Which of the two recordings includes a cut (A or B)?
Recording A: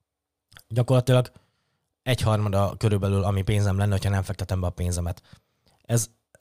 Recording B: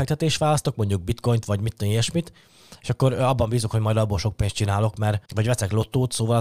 B